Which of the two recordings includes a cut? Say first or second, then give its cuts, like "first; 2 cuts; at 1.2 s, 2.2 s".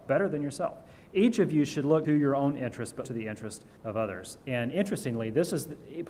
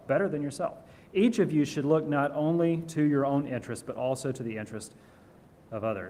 first; 3 cuts; at 2.0 s, 3.0 s, 3.8 s